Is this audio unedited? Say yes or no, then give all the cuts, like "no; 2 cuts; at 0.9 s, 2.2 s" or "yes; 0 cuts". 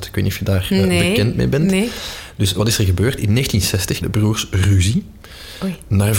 no; 1 cut; at 4.0 s